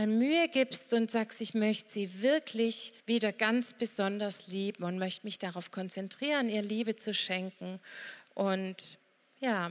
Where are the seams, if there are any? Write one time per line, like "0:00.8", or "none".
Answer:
0:03.0